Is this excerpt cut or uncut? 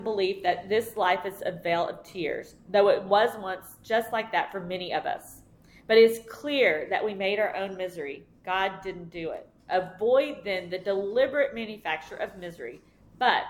uncut